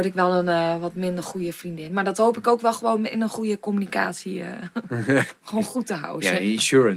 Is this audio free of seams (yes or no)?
yes